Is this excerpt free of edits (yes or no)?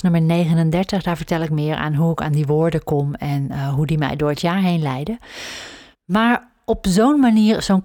no